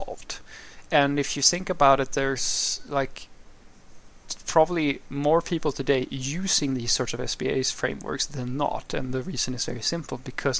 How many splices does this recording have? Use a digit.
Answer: 0